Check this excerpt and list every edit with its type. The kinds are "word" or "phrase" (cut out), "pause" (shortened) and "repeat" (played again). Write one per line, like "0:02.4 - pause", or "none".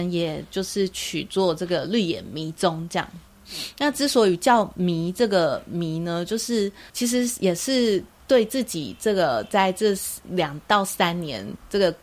none